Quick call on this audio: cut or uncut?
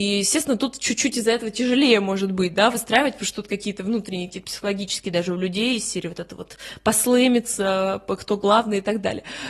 uncut